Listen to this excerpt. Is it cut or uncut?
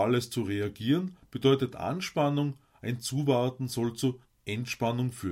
uncut